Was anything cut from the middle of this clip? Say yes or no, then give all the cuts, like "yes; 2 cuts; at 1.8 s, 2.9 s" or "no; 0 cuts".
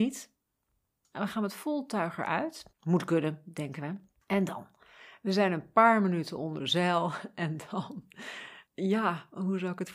yes; 3 cuts; at 2.7 s, 4.1 s, 8.7 s